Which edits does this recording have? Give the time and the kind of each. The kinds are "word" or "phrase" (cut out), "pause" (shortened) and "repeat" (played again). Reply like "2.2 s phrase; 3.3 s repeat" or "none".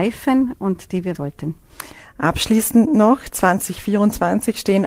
1.1 s word

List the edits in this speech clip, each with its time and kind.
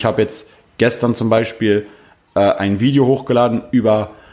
none

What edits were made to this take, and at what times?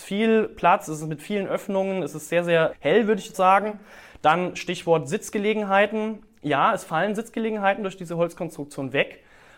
2.7 s word; 3.3 s word

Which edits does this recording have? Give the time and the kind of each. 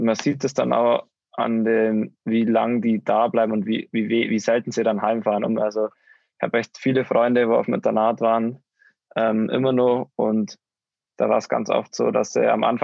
none

